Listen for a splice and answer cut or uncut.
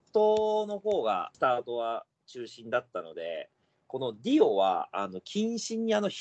uncut